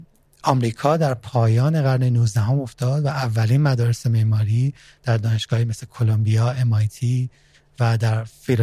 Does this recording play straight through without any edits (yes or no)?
yes